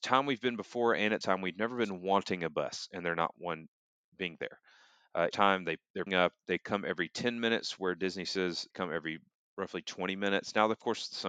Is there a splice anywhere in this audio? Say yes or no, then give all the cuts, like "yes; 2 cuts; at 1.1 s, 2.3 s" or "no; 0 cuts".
yes; 4 cuts; at 1.2 s, 5.3 s, 6.1 s, 8.7 s